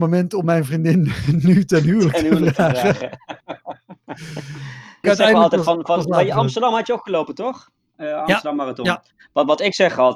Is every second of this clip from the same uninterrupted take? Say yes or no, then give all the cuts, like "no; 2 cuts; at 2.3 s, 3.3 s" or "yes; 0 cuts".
no; 1 cut; at 5.0 s